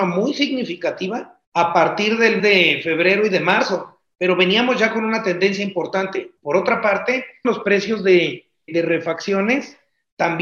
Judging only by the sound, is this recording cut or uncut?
cut